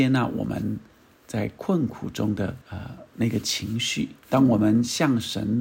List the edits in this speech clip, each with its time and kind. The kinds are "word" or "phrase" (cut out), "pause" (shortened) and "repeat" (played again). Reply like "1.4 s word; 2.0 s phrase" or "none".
2.6 s pause; 4.2 s pause